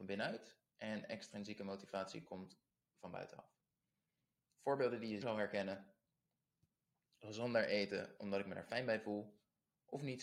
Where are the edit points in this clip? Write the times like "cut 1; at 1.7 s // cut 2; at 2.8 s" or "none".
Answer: cut 1; at 5.2 s